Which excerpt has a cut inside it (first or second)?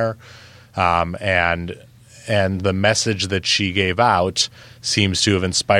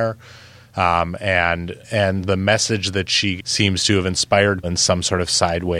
second